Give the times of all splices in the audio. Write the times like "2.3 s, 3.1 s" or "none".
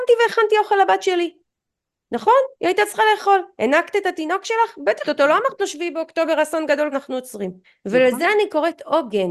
2.5 s, 5.0 s, 6.9 s, 7.6 s